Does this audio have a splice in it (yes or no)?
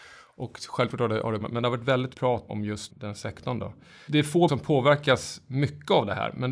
yes